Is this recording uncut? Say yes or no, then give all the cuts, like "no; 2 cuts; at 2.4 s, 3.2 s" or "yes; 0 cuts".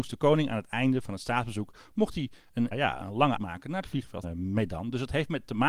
no; 3 cuts; at 2.7 s, 3.4 s, 4.2 s